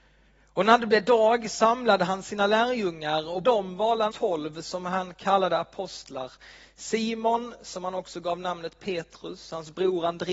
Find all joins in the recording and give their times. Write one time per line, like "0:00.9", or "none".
0:03.4
0:04.1